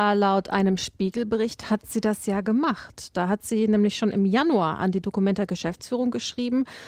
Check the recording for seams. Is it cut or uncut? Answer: uncut